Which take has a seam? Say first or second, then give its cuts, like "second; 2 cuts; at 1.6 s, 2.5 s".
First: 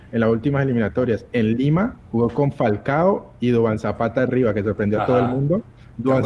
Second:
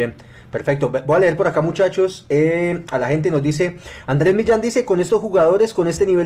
first; 1 cut; at 2.0 s